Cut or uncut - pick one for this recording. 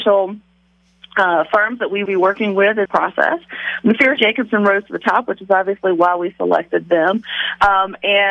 cut